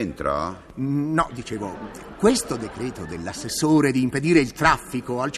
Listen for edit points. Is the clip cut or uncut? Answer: uncut